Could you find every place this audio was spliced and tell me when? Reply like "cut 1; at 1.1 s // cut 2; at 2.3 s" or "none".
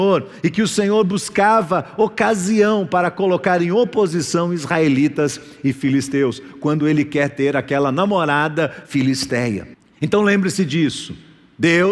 cut 1; at 9.7 s

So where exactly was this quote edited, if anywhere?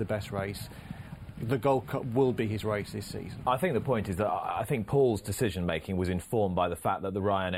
none

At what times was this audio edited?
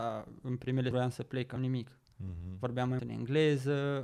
cut 1; at 0.9 s // cut 2; at 1.6 s // cut 3; at 3.0 s

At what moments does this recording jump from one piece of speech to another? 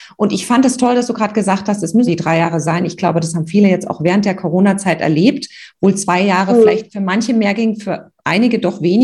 cut 1; at 2.1 s

